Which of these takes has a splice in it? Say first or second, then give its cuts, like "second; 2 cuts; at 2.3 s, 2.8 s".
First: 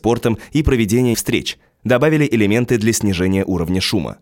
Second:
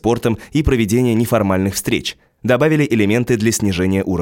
first; 1 cut; at 1.1 s